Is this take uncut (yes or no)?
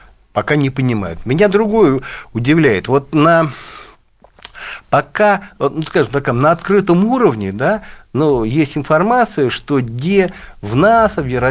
yes